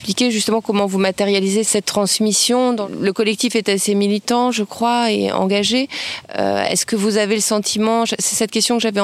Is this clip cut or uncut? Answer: cut